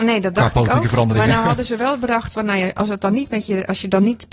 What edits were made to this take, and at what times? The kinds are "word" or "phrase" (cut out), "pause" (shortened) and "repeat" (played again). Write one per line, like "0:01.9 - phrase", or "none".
none